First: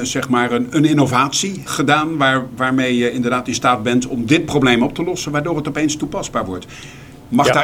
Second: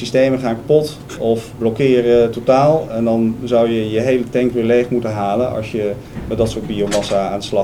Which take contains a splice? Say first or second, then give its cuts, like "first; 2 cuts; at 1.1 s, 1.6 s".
first; 1 cut; at 1.7 s